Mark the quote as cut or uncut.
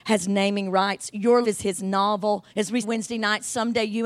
cut